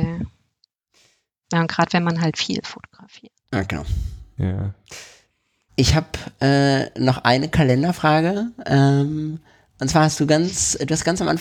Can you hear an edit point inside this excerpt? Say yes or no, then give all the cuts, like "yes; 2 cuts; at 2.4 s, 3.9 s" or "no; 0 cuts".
no; 0 cuts